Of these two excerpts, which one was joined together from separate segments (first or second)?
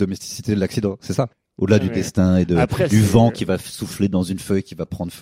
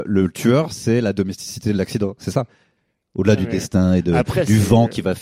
first